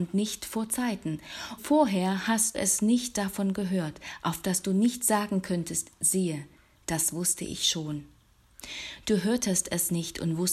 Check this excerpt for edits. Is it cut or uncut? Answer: cut